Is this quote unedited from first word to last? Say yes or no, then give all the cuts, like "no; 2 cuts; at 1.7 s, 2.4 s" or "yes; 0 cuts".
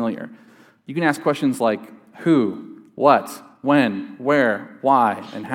yes; 0 cuts